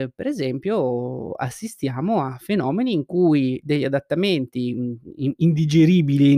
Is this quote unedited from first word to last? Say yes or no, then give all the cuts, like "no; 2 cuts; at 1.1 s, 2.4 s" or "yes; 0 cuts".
yes; 0 cuts